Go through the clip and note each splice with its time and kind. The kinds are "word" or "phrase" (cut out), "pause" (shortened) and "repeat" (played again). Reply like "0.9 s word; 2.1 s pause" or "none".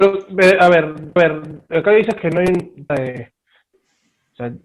1.2 s repeat; 2.9 s word